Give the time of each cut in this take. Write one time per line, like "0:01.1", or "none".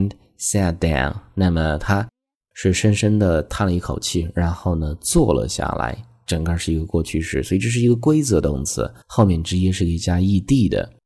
0:09.0